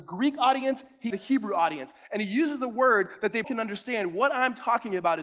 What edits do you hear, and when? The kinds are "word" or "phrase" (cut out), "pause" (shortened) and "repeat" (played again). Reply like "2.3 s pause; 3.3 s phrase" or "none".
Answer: 1.1 s word; 3.4 s word